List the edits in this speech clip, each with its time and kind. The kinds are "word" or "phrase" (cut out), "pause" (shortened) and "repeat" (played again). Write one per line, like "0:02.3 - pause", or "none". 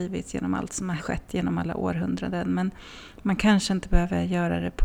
0:01.0 - word